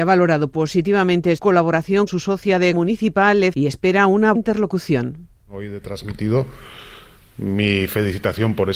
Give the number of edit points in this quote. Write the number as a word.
five